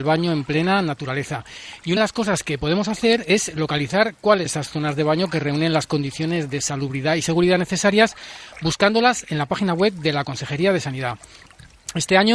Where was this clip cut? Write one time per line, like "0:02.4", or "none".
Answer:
0:02.0
0:04.5